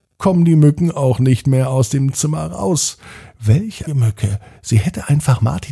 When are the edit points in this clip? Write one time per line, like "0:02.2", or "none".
0:03.9